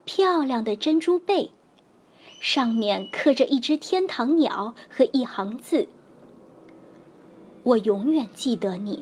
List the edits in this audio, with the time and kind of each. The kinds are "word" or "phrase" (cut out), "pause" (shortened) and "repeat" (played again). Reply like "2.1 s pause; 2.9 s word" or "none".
none